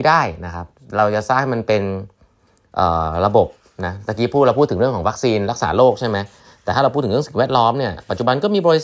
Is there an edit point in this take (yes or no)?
no